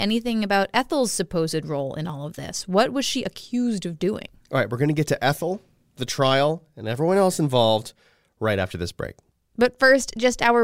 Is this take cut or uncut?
uncut